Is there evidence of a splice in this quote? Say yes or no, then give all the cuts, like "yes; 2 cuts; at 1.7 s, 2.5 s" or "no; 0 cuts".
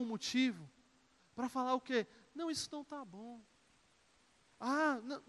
no; 0 cuts